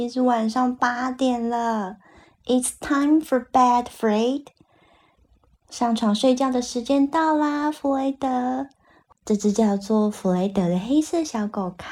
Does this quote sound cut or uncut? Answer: uncut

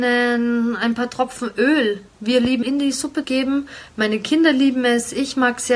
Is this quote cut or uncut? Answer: cut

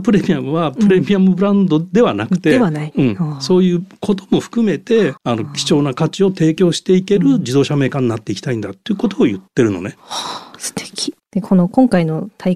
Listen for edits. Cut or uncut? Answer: cut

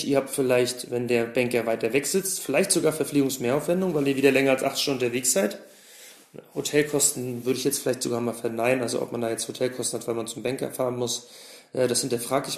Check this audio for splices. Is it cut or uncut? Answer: uncut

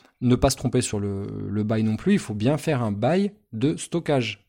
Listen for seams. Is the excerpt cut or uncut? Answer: uncut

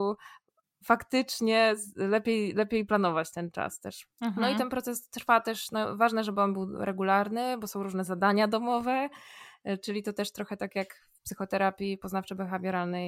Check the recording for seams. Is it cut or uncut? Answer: cut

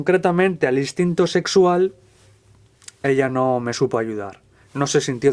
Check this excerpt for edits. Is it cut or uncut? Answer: uncut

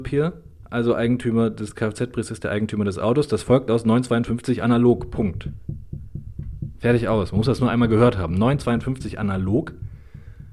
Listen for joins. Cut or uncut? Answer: uncut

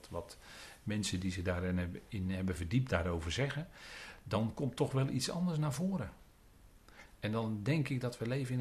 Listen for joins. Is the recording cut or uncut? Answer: uncut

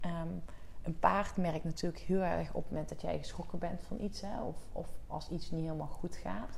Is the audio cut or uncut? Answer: uncut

